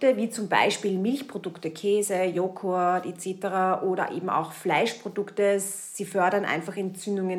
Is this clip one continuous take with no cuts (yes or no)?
yes